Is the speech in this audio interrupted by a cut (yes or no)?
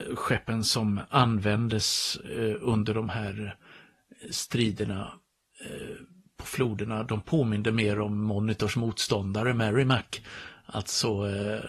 no